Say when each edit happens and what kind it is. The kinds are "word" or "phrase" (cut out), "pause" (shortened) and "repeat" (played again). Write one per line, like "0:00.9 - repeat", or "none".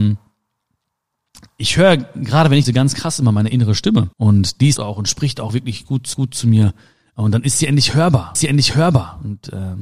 0:02.6 - phrase
0:04.1 - pause
0:04.8 - phrase
0:06.1 - repeat
0:08.4 - repeat

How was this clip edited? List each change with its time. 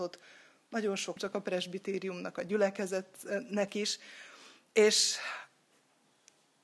0:01.2 - phrase

